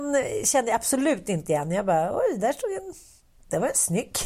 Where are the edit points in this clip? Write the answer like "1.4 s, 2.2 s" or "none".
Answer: none